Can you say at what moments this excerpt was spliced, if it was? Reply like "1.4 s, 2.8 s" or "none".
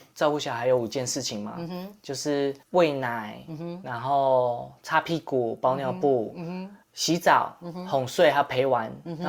2.6 s, 6.8 s